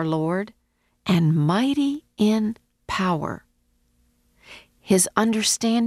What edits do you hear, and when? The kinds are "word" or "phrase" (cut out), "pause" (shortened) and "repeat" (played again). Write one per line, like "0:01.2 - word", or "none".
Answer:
none